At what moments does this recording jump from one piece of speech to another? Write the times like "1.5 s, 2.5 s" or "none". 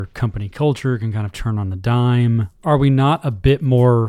2.6 s